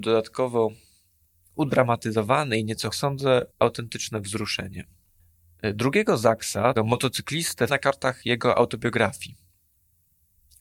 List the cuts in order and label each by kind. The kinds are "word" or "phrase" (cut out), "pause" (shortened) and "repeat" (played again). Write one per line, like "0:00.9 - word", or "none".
0:02.9 - phrase
0:03.5 - pause
0:06.8 - word
0:07.7 - phrase